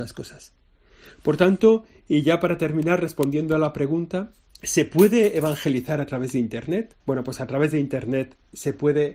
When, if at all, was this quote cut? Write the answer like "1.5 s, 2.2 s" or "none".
4.5 s, 7.0 s